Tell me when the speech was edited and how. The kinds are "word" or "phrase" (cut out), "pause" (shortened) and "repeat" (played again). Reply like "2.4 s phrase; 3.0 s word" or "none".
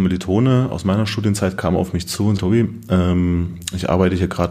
2.4 s word